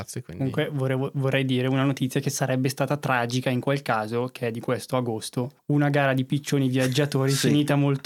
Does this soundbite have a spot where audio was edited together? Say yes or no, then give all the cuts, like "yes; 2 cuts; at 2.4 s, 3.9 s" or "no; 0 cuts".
no; 0 cuts